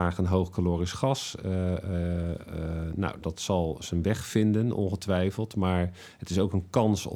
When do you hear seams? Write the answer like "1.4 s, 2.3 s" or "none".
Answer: none